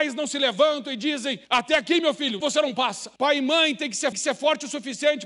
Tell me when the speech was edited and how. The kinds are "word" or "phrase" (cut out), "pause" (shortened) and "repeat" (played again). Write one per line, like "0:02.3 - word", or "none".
0:01.4 - pause
0:02.4 - word
0:03.2 - pause
0:04.1 - repeat